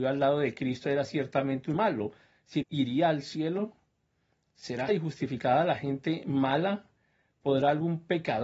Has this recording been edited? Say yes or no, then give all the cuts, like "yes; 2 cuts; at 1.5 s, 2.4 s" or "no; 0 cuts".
yes; 3 cuts; at 1.7 s, 2.6 s, 4.9 s